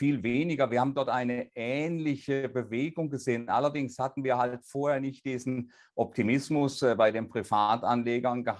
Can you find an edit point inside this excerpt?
no; 0 cuts

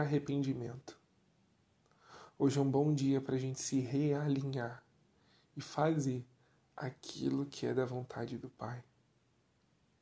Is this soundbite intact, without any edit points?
yes; 0 cuts

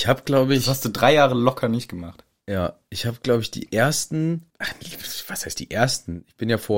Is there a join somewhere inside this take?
no; 0 cuts

